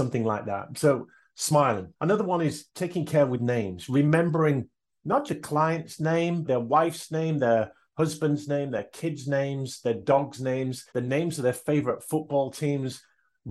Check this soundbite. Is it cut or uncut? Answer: cut